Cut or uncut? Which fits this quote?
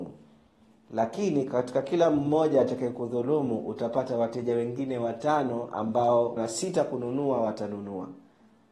cut